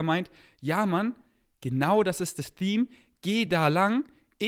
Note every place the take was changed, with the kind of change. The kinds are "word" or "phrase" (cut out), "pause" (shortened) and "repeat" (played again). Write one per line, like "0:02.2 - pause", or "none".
none

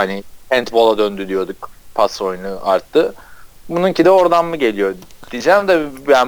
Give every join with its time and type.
none

